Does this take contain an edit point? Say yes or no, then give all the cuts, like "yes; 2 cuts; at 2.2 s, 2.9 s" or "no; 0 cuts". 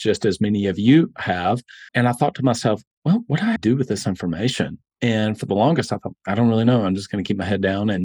yes; 2 cuts; at 1.9 s, 3.6 s